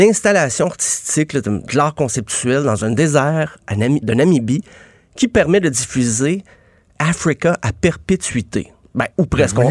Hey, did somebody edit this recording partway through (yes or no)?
yes